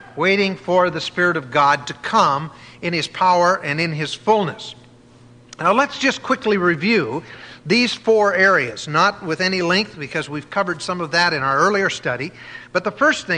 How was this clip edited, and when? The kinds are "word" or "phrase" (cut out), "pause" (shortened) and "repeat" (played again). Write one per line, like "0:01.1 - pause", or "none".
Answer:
none

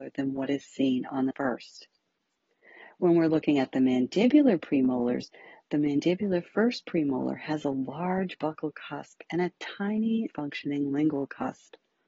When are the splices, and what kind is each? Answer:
0:01.3 - word
0:10.3 - word

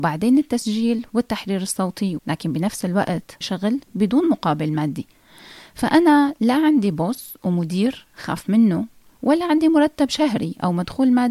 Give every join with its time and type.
0:02.2 - word
0:03.4 - word

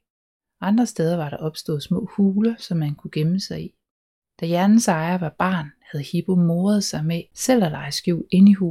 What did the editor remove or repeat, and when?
0:03.9 - pause

